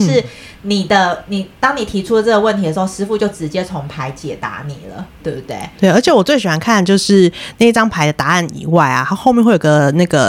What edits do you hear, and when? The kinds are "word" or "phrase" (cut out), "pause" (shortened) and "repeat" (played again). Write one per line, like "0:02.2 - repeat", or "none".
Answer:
none